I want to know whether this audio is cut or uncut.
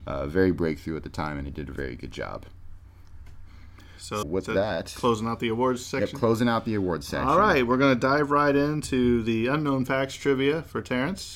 cut